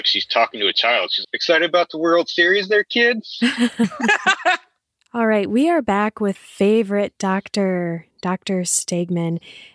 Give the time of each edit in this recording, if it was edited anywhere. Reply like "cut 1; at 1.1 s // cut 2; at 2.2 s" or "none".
cut 1; at 1.2 s // cut 2; at 6.3 s